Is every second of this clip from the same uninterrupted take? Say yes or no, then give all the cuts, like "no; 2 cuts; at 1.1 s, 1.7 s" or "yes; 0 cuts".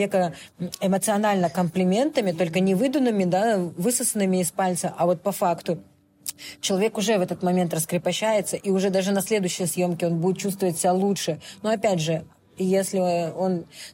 yes; 0 cuts